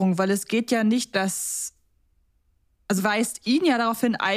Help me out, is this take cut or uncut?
cut